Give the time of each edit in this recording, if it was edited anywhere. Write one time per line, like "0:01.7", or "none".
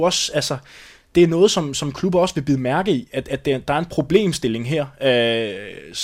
none